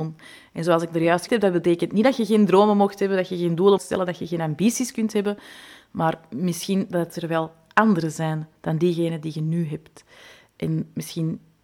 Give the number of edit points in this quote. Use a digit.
2